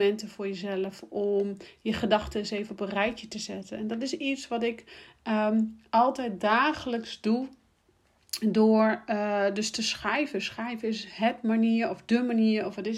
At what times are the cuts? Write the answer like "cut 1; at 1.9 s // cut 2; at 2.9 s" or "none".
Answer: none